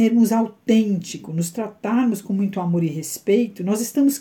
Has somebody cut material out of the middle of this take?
no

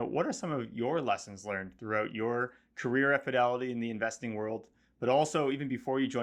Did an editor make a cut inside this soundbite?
no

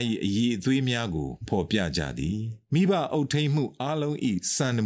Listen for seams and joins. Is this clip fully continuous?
no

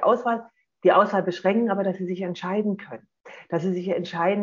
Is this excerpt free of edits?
yes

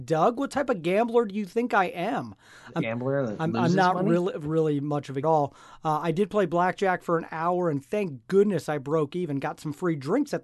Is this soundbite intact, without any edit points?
no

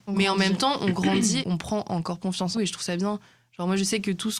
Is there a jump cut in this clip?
yes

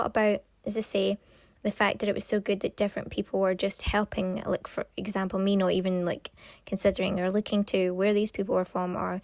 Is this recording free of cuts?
yes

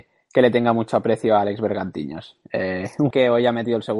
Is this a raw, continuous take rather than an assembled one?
no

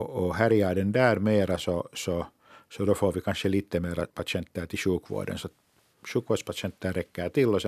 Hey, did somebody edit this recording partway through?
yes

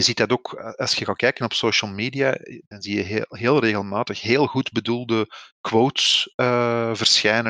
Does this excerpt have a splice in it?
no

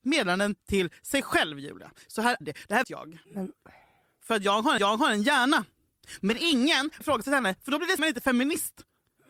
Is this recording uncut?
no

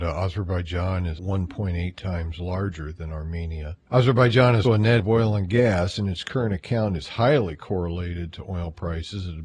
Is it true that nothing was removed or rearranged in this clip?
no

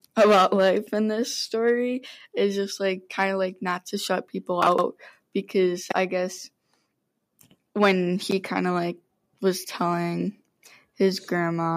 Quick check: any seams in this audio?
no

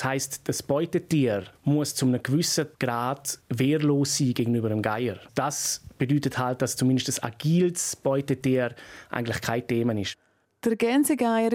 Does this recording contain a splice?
no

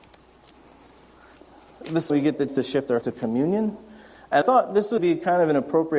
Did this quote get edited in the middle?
yes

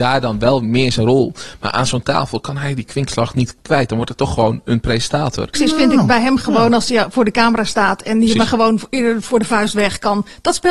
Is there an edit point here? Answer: no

